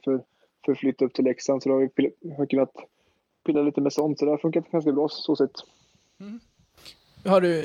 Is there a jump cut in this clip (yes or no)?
no